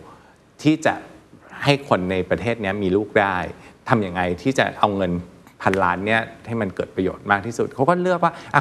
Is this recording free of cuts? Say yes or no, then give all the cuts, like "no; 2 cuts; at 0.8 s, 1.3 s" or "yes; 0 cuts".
yes; 0 cuts